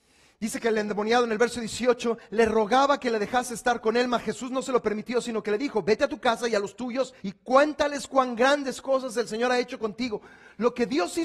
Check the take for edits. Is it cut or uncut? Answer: cut